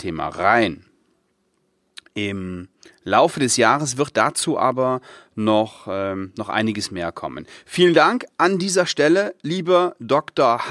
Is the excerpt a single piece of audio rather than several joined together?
yes; 0 cuts

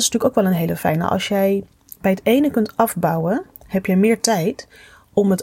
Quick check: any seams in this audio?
no; 0 cuts

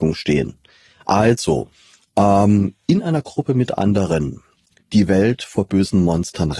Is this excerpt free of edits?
yes; 0 cuts

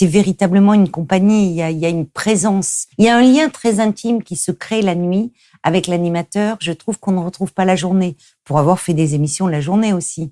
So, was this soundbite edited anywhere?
yes; 1 cut; at 2.9 s

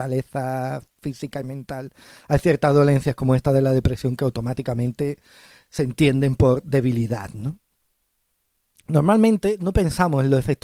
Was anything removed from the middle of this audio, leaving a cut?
no; 0 cuts

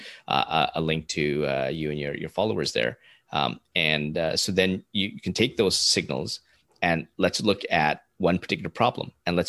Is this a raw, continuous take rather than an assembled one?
yes; 0 cuts

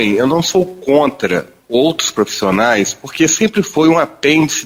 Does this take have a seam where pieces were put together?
no; 0 cuts

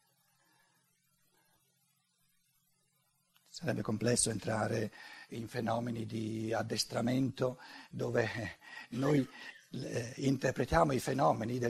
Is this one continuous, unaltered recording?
yes; 0 cuts

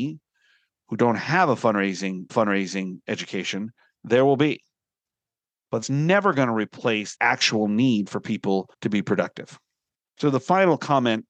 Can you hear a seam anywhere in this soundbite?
yes; 5 cuts; at 2.3 s, 5.8 s, 7.1 s, 8.7 s, 9.9 s

